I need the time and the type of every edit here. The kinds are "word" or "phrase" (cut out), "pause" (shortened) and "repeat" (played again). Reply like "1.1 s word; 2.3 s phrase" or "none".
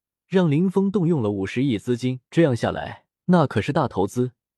2.3 s pause; 3.1 s pause